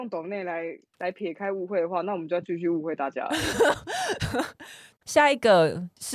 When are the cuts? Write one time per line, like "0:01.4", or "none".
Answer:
0:05.0